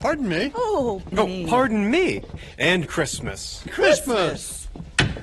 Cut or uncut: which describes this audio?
cut